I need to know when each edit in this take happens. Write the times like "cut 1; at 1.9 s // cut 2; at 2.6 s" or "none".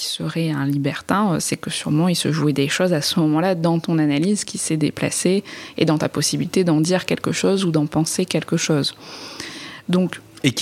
none